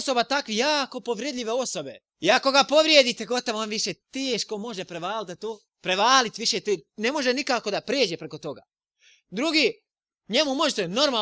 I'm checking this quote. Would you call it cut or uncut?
cut